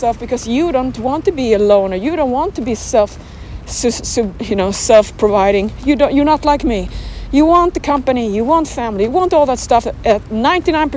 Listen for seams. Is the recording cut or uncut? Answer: uncut